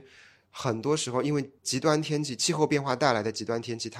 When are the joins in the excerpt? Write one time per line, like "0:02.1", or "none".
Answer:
0:01.6

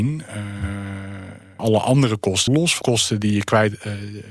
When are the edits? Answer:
0:01.6
0:02.5
0:02.8

